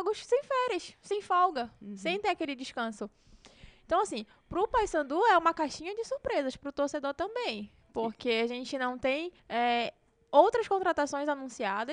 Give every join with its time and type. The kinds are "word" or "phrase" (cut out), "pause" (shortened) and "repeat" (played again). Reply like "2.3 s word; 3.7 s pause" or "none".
9.4 s pause